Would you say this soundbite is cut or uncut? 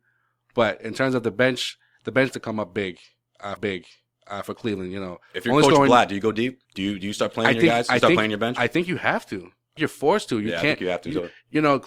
cut